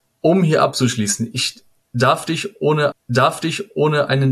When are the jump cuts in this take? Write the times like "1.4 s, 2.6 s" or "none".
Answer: 2.9 s